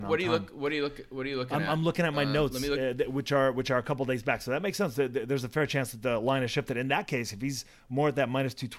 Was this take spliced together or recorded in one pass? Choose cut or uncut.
uncut